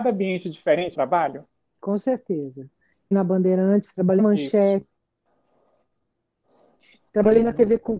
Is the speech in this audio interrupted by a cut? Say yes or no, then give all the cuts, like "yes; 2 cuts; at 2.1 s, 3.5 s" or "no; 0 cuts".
yes; 4 cuts; at 0.9 s, 3.1 s, 4.2 s, 7.1 s